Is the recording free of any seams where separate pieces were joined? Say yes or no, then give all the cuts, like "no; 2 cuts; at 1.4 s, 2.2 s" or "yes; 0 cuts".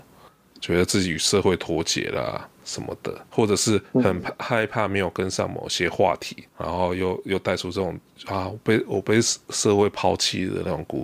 no; 3 cuts; at 2.5 s, 3.3 s, 6.5 s